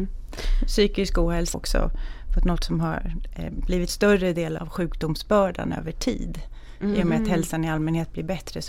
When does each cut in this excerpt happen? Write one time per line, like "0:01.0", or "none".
0:01.5
0:03.9
0:04.6